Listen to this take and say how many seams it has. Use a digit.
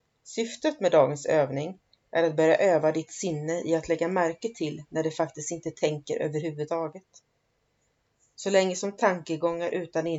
0